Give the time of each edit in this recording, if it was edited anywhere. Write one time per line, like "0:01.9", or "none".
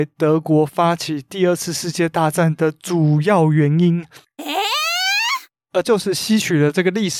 0:05.8